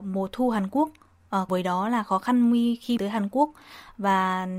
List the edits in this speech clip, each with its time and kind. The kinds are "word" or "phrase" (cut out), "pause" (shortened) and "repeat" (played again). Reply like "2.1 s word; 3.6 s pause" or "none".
1.5 s word; 3.0 s word